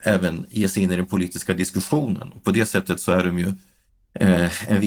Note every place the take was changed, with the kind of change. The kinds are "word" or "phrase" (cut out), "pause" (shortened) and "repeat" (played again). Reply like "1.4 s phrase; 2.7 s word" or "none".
none